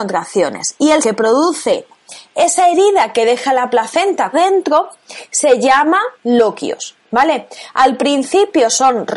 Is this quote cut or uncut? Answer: cut